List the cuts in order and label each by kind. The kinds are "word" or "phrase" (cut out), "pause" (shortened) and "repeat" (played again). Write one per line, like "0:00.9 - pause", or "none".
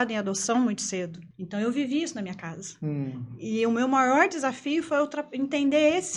0:01.3 - pause